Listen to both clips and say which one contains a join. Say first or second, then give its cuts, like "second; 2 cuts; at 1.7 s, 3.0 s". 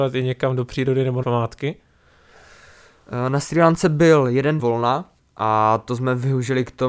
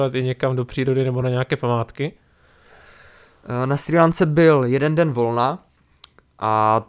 first; 3 cuts; at 1.2 s, 4.6 s, 5.2 s